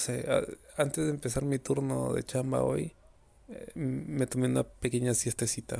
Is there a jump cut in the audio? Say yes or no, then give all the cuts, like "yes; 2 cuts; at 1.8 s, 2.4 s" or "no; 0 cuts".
yes; 1 cut; at 3.1 s